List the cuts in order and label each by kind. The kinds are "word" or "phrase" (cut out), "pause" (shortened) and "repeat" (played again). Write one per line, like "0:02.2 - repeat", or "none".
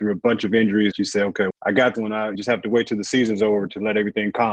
0:00.9 - word
0:01.5 - word
0:01.9 - word
0:02.3 - word